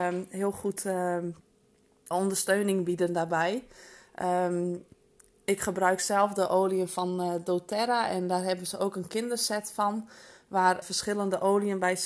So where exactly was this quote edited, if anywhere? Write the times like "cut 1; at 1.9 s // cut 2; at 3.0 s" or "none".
cut 1; at 2.1 s // cut 2; at 10.8 s